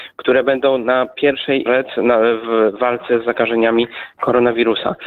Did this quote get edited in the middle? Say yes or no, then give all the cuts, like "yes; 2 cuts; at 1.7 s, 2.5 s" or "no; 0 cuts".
yes; 1 cut; at 1.7 s